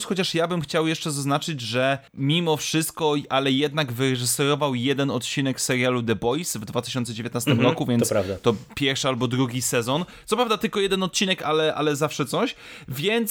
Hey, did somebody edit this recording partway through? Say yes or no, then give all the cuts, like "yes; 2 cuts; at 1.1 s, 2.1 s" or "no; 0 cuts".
yes; 1 cut; at 2.1 s